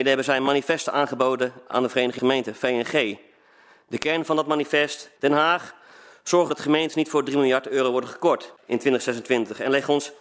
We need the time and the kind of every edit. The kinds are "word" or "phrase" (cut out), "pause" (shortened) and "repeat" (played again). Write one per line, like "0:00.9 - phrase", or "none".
0:02.2 - word
0:05.2 - pause
0:06.5 - word
0:08.6 - pause